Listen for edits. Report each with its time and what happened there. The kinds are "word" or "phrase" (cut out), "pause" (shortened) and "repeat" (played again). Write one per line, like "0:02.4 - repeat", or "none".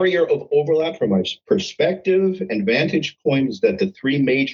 none